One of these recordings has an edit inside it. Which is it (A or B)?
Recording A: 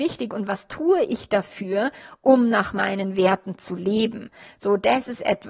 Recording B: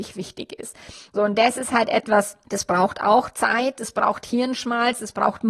B